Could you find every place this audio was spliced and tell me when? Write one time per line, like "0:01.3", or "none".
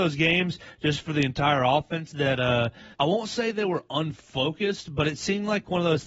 0:02.9